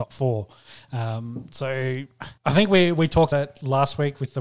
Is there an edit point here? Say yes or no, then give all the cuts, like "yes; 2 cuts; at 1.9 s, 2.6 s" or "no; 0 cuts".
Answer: yes; 2 cuts; at 2.4 s, 3.3 s